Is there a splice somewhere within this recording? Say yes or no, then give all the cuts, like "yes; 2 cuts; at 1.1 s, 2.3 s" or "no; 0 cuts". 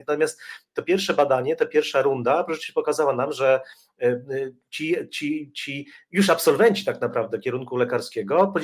no; 0 cuts